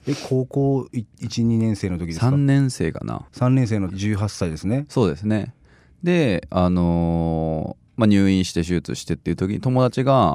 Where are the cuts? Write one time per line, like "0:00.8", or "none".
0:03.3
0:03.9

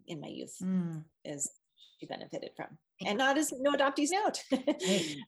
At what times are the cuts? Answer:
0:02.1
0:03.1
0:04.1

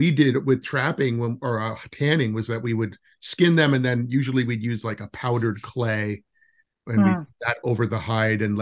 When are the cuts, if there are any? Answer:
none

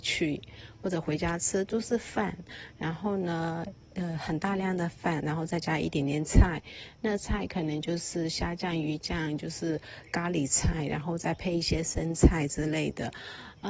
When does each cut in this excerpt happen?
none

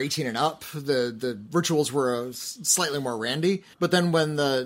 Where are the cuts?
0:03.7

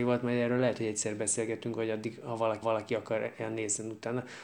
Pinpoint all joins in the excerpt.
0:02.6

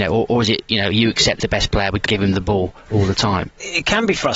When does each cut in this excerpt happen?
0:01.4
0:02.1

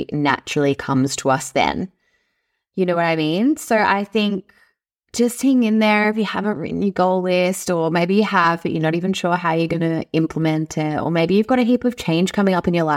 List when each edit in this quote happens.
none

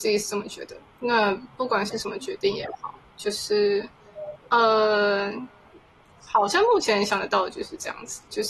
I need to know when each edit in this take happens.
0:04.4

